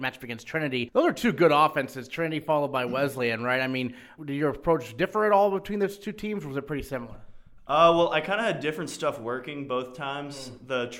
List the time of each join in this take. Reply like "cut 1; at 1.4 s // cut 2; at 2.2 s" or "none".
none